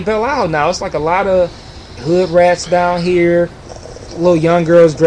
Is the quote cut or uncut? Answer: cut